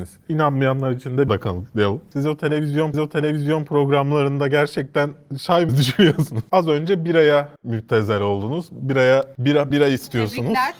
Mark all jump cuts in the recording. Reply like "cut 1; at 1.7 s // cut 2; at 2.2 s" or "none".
cut 1; at 1.3 s // cut 2; at 2.9 s // cut 3; at 5.7 s // cut 4; at 7.6 s // cut 5; at 9.7 s